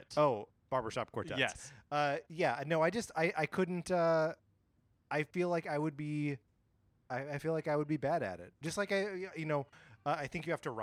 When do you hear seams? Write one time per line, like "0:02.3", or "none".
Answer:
none